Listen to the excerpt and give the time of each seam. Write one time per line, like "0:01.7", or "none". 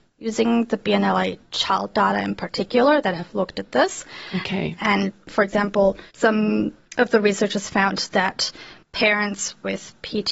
0:06.1
0:08.8